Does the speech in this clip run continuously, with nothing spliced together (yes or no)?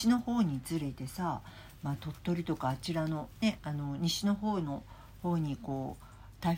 yes